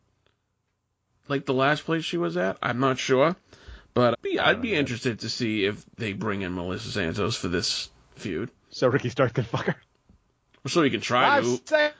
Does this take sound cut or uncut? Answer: cut